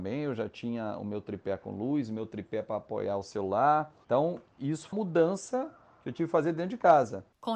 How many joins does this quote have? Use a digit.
1